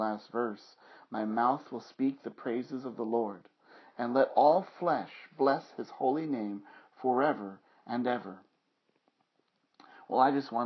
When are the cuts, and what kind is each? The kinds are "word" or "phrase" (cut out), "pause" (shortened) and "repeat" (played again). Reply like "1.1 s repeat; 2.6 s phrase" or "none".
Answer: none